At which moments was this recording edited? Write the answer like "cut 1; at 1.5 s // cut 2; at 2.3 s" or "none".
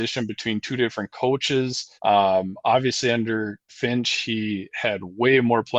cut 1; at 2.0 s // cut 2; at 3.7 s